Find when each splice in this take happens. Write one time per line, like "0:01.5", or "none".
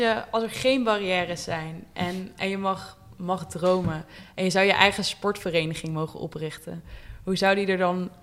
0:02.3